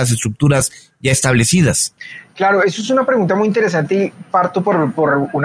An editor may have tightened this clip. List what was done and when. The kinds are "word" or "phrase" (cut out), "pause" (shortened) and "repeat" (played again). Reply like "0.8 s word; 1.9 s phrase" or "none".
none